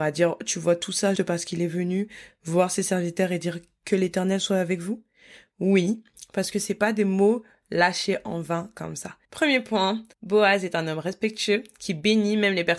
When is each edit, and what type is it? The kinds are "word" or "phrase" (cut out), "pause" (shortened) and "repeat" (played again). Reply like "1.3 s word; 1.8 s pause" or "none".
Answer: 1.2 s word; 9.2 s pause; 10.1 s pause